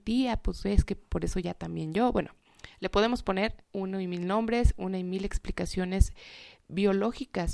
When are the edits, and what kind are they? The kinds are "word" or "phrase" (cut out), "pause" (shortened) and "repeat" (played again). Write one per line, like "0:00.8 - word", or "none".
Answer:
0:03.6 - pause